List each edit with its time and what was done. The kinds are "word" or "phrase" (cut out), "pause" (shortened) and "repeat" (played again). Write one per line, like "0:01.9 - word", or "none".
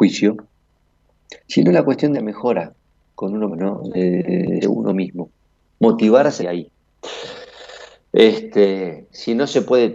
0:01.4 - pause
0:02.1 - phrase
0:03.5 - word
0:04.6 - word
0:06.4 - word